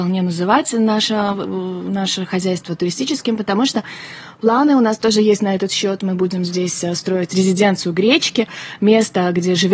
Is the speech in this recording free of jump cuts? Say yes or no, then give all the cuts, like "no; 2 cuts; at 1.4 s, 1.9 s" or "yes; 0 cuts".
yes; 0 cuts